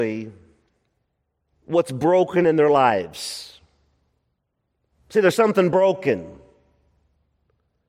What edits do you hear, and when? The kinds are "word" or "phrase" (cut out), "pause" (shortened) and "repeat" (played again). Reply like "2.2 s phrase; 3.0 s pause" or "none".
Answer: none